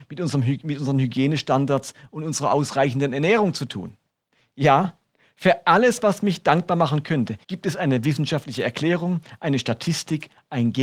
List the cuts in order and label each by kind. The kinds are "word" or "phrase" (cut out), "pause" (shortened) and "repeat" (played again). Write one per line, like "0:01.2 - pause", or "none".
0:04.1 - pause
0:07.4 - pause